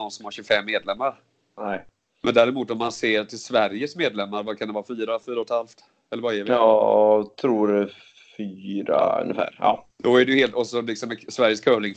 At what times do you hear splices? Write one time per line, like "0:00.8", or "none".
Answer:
none